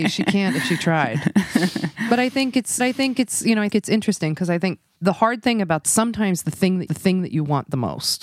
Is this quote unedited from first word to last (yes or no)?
no